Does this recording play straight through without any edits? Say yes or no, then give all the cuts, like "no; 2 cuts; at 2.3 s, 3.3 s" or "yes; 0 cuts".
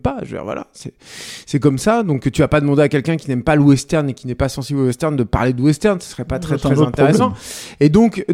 yes; 0 cuts